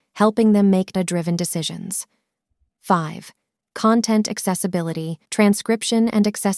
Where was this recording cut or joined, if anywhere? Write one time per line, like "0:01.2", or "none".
0:00.9
0:05.2

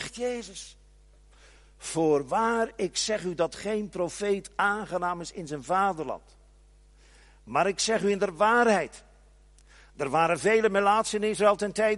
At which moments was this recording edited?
none

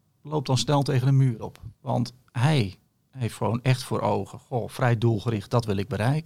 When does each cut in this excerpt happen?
0:01.7

